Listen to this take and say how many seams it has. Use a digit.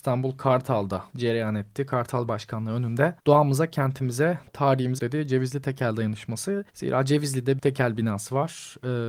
6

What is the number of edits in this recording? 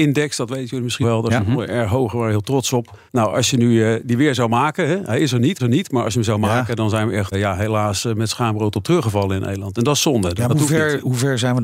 6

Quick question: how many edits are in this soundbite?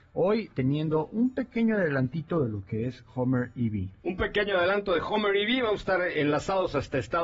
1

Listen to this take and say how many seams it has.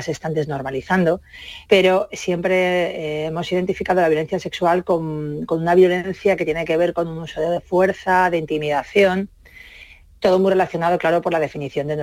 0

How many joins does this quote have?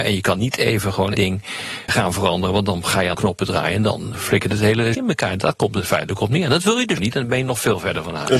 6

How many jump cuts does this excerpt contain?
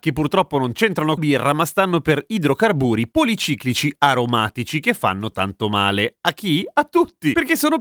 2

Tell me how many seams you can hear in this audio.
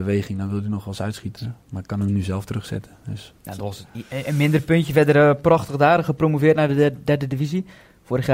1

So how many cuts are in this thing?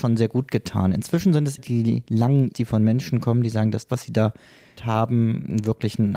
4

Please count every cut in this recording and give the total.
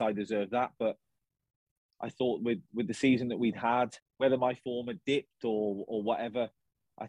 0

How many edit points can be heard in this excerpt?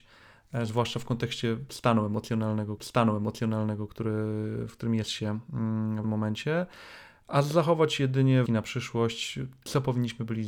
3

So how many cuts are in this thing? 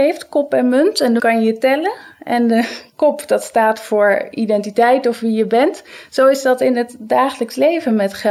1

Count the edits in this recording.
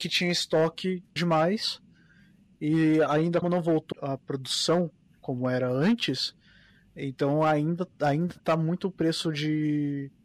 3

